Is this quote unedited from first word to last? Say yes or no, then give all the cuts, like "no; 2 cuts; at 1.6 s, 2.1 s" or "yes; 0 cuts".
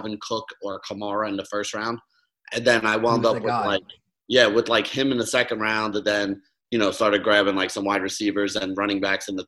yes; 0 cuts